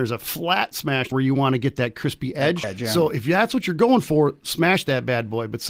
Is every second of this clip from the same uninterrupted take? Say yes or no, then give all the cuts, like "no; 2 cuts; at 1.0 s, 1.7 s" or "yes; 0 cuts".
no; 2 cuts; at 1.1 s, 2.6 s